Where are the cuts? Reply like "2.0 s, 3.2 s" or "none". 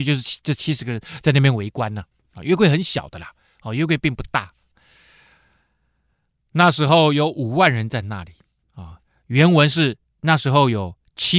10.0 s